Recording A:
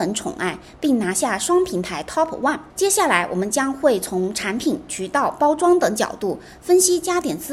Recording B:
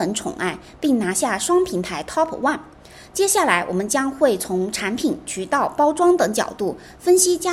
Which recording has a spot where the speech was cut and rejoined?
A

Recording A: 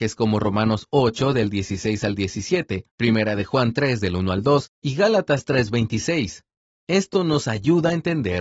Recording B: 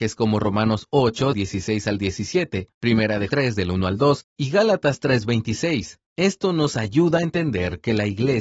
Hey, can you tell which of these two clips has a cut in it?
B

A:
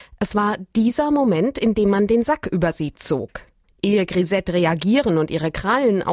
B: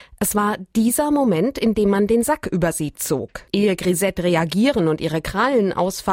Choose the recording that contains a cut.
B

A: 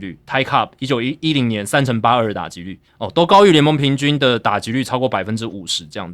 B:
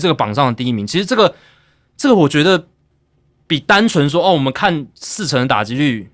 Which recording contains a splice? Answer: A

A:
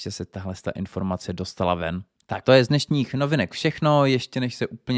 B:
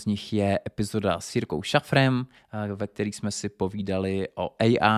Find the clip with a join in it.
A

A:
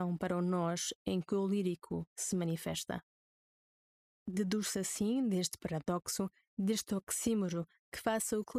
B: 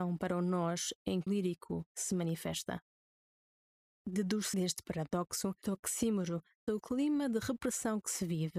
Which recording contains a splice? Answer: B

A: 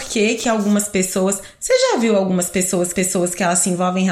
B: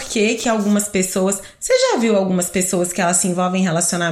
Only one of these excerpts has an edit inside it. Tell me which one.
A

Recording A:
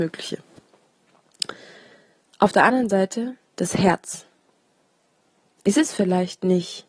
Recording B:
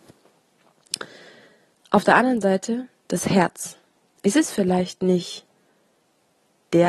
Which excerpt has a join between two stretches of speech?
B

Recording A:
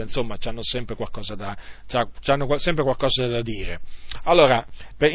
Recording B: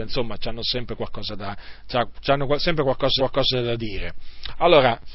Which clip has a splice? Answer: B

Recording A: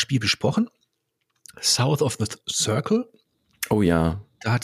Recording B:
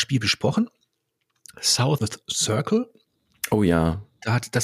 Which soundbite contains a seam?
B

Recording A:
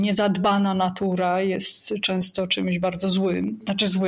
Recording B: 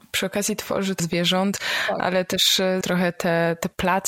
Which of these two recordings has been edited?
B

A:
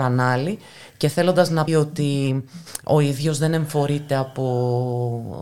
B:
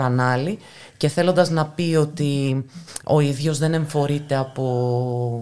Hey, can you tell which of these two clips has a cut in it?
A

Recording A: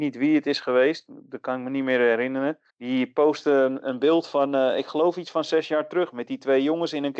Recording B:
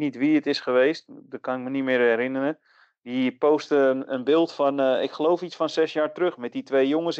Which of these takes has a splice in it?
A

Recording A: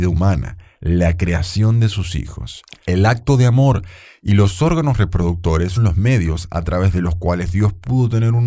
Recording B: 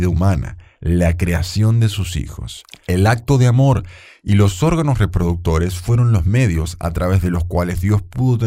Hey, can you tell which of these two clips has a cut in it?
A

